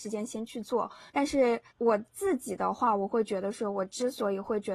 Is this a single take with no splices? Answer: no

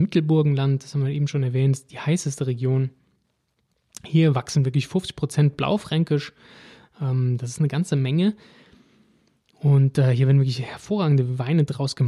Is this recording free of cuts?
yes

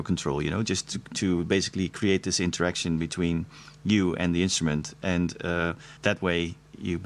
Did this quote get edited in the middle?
yes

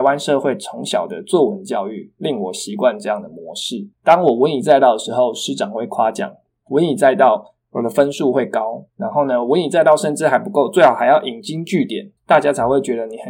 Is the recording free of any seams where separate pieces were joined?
no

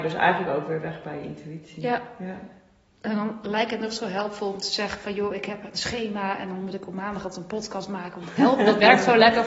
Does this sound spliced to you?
no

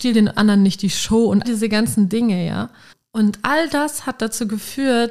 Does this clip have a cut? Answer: yes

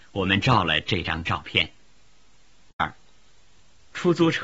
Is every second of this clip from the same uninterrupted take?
yes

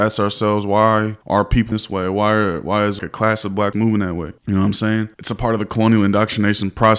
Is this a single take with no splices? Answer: no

